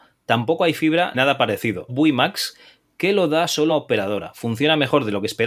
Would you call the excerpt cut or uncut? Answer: cut